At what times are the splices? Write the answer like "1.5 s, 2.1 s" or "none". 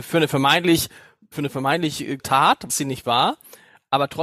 1.3 s, 2.2 s, 2.7 s